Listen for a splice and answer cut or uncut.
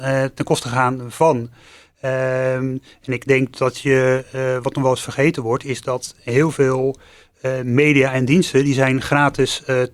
uncut